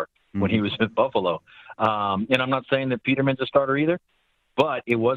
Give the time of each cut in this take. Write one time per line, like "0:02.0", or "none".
none